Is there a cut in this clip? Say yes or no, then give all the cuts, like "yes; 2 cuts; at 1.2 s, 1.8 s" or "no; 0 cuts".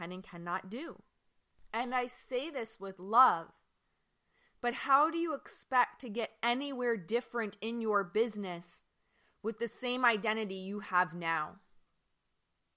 no; 0 cuts